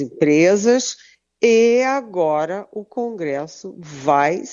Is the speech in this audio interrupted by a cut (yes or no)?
no